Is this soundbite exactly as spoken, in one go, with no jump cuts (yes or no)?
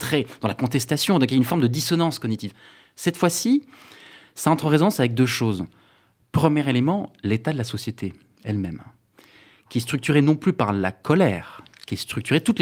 yes